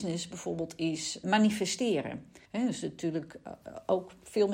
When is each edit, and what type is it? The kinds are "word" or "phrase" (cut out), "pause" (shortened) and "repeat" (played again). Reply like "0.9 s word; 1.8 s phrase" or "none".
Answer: 1.2 s word; 2.4 s pause